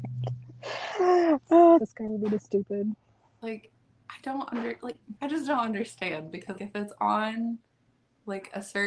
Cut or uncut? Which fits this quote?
cut